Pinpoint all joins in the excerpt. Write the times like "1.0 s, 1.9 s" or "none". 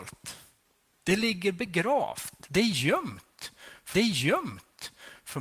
3.9 s